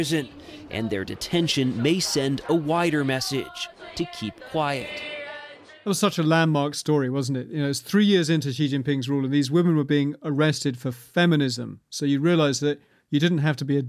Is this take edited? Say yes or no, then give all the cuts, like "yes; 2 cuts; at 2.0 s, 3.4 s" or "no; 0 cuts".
no; 0 cuts